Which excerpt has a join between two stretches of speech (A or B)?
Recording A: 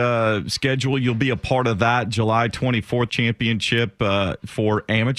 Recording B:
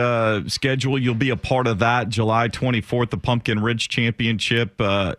A